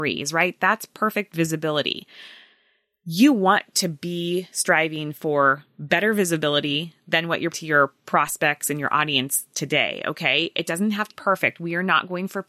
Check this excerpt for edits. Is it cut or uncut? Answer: cut